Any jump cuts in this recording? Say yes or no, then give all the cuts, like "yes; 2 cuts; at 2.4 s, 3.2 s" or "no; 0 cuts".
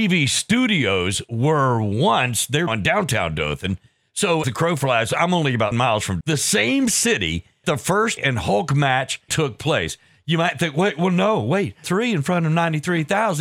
yes; 8 cuts; at 2.7 s, 4.4 s, 5.7 s, 6.2 s, 7.6 s, 8.2 s, 9.3 s, 11.8 s